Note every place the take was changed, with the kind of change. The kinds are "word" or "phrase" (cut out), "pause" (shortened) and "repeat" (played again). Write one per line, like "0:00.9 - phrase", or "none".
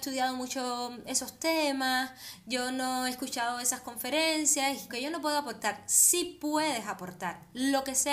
0:04.9 - word